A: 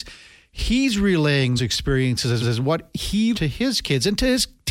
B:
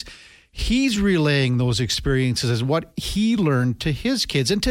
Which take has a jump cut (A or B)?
A